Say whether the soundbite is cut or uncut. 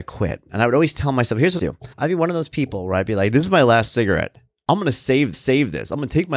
cut